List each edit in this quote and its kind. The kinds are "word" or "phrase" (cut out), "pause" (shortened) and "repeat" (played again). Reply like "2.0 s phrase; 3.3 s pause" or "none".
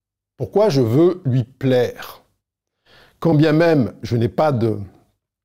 none